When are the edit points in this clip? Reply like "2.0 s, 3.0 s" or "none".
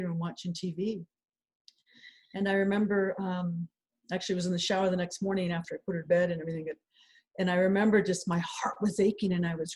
none